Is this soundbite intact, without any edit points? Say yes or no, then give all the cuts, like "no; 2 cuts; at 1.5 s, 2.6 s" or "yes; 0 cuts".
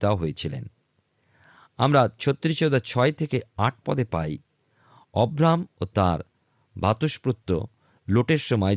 yes; 0 cuts